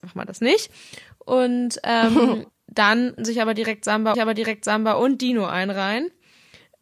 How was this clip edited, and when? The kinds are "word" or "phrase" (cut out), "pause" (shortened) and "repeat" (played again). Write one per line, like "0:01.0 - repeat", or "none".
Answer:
0:02.5 - pause
0:03.2 - word
0:04.1 - repeat